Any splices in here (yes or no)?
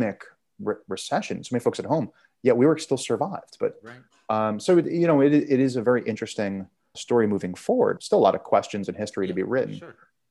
yes